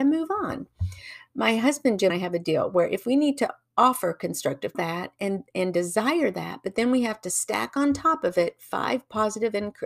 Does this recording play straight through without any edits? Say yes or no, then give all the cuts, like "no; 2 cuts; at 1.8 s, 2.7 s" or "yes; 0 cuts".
no; 2 cuts; at 2.1 s, 4.7 s